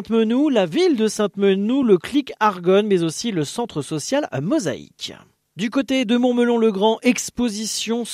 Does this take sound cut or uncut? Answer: uncut